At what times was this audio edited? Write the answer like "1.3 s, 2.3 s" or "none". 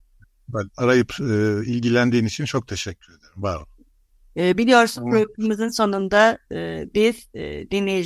none